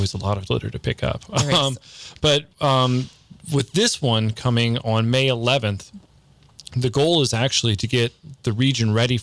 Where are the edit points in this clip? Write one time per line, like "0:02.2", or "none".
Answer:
0:02.5